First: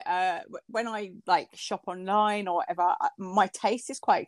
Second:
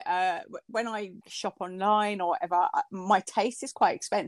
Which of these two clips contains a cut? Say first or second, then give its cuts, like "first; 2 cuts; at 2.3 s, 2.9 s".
second; 1 cut; at 1.2 s